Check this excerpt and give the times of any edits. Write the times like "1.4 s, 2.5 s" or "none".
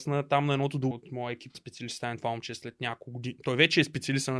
0.9 s, 1.5 s